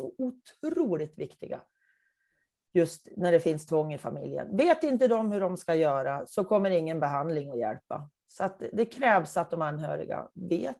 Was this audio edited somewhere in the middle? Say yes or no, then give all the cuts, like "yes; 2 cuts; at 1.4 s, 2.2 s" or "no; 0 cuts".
no; 0 cuts